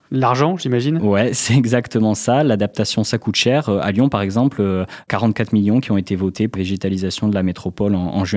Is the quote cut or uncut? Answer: cut